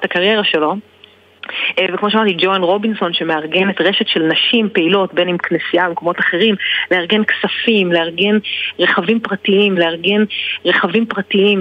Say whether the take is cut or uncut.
cut